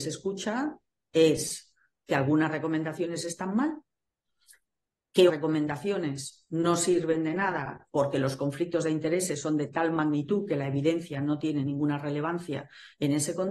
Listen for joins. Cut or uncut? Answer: cut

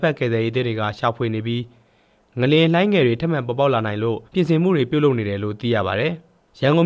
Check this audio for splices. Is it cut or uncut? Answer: cut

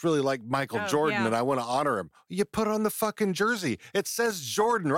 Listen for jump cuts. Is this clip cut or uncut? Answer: uncut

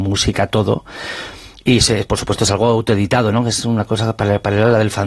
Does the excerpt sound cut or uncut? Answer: uncut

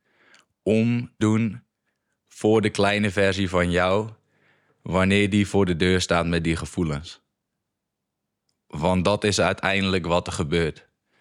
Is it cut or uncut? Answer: cut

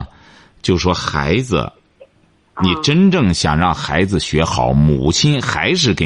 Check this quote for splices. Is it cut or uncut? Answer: uncut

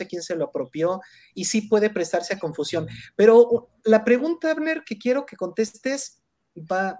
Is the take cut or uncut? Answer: uncut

